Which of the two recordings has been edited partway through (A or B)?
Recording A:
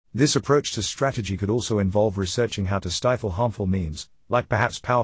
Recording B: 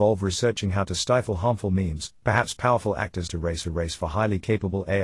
B